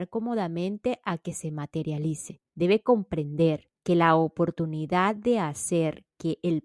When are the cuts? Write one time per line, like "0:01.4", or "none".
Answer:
0:02.5
0:03.8